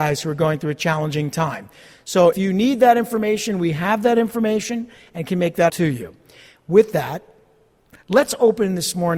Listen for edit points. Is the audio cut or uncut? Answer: cut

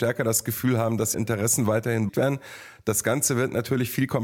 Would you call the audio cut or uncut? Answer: cut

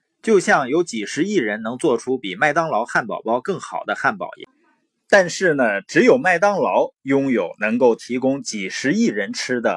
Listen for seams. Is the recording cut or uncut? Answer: uncut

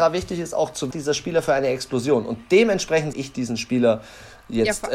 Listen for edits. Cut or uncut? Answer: cut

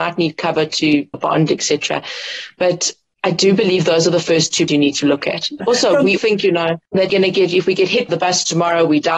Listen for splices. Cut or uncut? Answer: cut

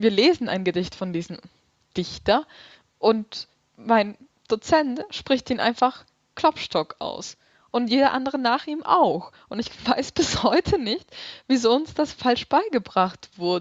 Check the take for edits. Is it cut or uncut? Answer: uncut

